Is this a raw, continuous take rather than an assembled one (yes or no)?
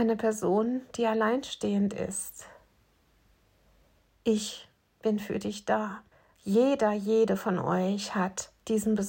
no